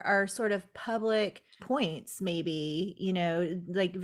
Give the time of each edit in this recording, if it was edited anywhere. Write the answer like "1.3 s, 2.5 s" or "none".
1.6 s